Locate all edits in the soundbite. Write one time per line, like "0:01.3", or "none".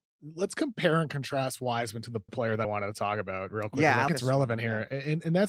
0:02.3
0:02.6
0:04.1